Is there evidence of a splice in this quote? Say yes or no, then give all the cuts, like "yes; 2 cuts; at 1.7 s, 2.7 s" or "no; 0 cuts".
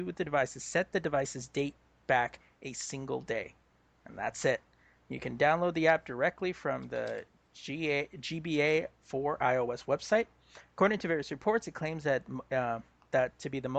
no; 0 cuts